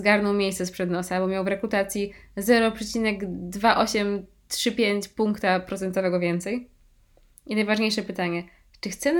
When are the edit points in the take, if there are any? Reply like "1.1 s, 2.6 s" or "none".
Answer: none

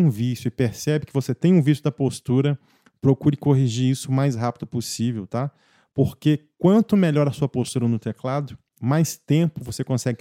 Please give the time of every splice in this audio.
none

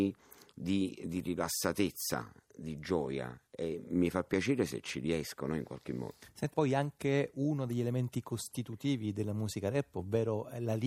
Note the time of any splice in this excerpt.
6.5 s

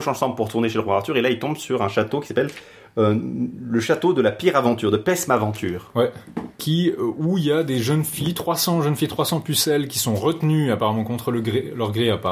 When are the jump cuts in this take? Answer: 6.5 s

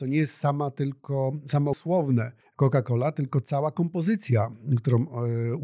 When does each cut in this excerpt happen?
1.7 s, 2.4 s

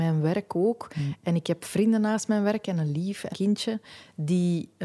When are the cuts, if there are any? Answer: 3.3 s

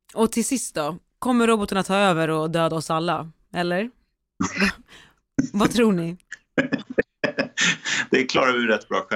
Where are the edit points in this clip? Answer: none

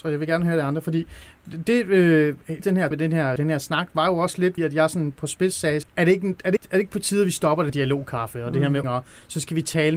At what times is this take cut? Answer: 2.6 s, 2.9 s, 3.4 s, 4.6 s, 5.8 s, 6.6 s, 7.7 s, 8.8 s

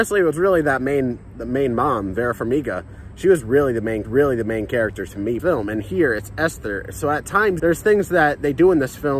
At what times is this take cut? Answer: 4.0 s, 5.4 s, 7.6 s

